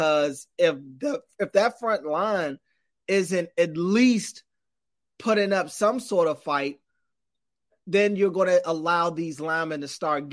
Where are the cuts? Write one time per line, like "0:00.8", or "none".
none